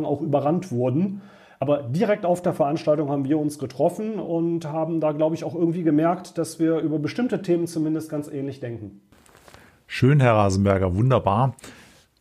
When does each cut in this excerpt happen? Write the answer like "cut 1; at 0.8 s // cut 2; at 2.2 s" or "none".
none